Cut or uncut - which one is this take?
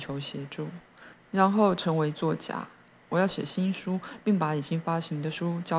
uncut